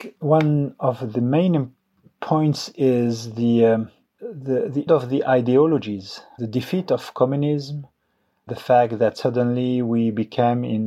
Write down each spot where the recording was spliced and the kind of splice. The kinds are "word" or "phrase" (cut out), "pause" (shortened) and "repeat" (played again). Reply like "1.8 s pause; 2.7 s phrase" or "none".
4.9 s word